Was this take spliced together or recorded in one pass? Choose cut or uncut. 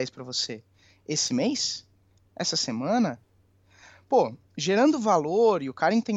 cut